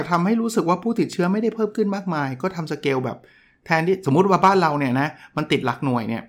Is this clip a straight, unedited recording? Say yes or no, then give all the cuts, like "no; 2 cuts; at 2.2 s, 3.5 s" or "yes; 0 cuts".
yes; 0 cuts